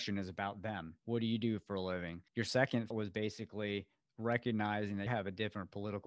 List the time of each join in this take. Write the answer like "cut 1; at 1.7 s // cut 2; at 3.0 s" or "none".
cut 1; at 1.0 s // cut 2; at 2.3 s // cut 3; at 2.9 s // cut 4; at 5.1 s